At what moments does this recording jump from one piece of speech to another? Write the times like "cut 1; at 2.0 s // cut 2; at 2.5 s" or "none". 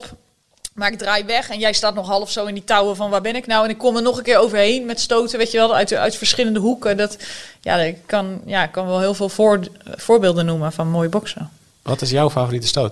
none